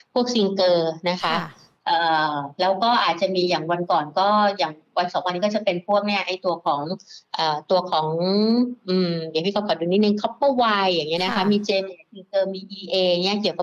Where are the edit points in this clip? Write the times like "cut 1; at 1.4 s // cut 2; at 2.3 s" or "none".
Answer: cut 1; at 8.8 s